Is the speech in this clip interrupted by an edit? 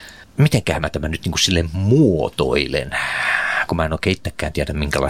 no; 0 cuts

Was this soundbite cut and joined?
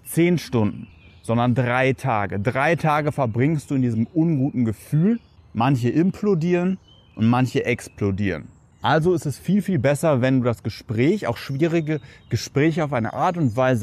no; 0 cuts

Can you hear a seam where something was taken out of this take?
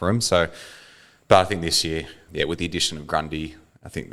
yes; 1 cut; at 2.3 s

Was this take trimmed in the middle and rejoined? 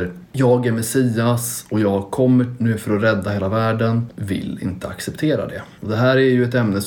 yes; 1 cut; at 4.1 s

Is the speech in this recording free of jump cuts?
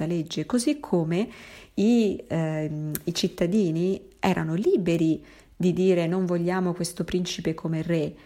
yes; 0 cuts

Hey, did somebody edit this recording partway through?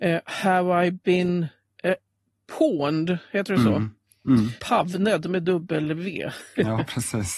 yes; 1 cut; at 4.6 s

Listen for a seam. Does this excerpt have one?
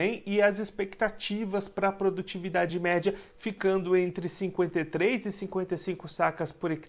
no; 0 cuts

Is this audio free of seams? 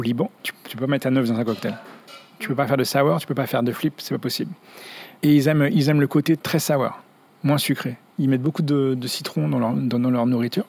yes; 0 cuts

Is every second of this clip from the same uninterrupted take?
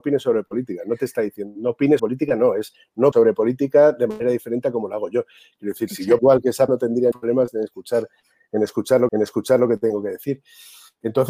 no; 6 cuts; at 2.0 s, 3.1 s, 6.2 s, 6.7 s, 7.1 s, 9.1 s

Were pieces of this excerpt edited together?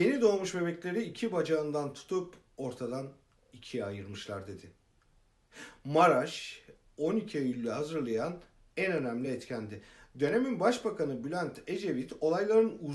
no; 0 cuts

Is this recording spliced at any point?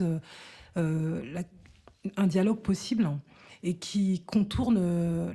no; 0 cuts

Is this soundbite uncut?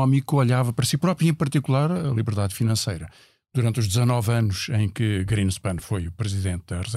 yes; 0 cuts

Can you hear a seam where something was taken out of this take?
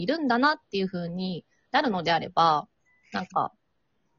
no; 0 cuts

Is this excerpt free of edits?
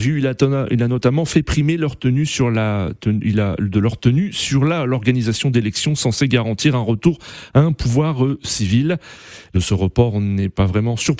no; 1 cut; at 9.5 s

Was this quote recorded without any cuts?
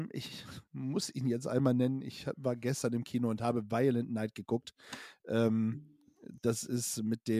yes; 0 cuts

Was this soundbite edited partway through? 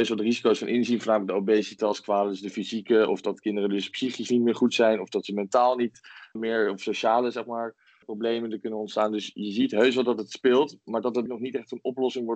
yes; 3 cuts; at 6.4 s, 8.0 s, 11.3 s

